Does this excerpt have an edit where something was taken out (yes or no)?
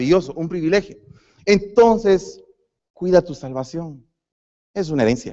no